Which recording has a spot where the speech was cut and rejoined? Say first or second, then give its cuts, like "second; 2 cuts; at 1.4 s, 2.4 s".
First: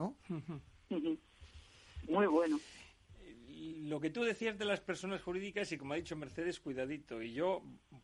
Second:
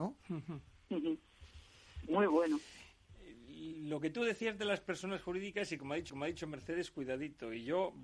second; 1 cut; at 6.1 s